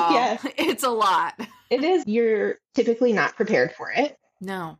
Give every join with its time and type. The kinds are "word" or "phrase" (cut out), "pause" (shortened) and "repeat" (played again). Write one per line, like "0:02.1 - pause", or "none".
0:02.0 - phrase